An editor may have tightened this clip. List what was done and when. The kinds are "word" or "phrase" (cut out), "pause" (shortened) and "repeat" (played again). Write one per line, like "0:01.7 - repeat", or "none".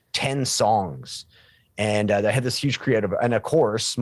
none